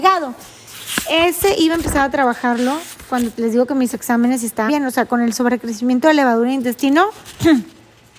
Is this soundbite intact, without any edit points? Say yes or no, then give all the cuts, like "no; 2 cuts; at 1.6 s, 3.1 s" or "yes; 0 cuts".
no; 2 cuts; at 3.9 s, 4.7 s